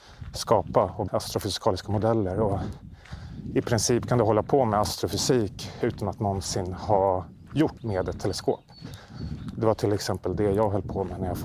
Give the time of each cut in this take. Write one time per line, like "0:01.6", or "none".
0:01.1
0:07.8

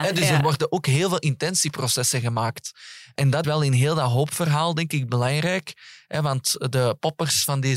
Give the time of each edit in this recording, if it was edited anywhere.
0:03.4

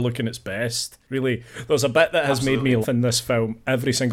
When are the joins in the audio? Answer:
0:02.8

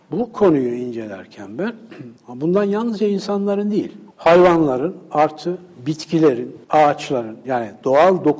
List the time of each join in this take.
0:02.2
0:04.1
0:06.6

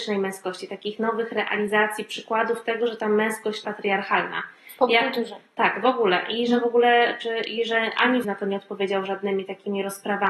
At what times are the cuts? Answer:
0:03.6
0:08.2

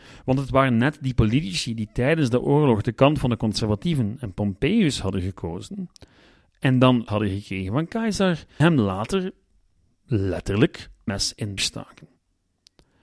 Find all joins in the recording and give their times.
0:07.1
0:08.6
0:11.1
0:11.6

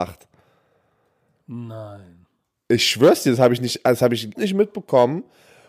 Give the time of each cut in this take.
0:04.3

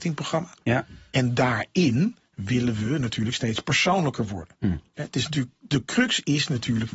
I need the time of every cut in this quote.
none

